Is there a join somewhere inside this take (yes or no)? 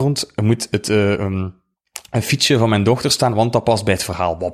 no